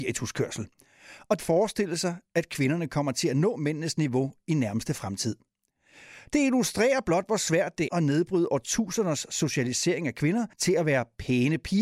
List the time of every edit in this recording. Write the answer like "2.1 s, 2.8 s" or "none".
1.4 s, 7.9 s, 10.5 s